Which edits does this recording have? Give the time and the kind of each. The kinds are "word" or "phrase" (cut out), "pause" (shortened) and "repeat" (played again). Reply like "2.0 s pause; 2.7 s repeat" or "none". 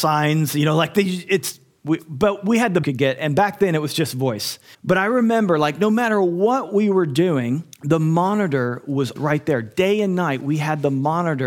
2.8 s phrase; 4.7 s pause; 7.7 s pause; 9.2 s word